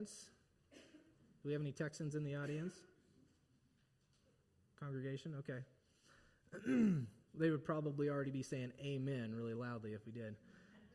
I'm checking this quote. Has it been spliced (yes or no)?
no